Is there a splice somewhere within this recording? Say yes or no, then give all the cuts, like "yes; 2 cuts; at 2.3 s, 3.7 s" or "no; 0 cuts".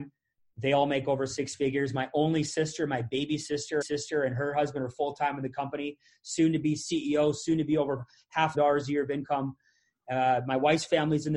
yes; 2 cuts; at 3.8 s, 8.5 s